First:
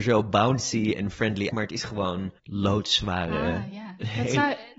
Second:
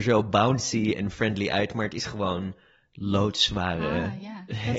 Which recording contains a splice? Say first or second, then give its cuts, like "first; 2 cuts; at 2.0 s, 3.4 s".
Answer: first; 2 cuts; at 1.5 s, 2.4 s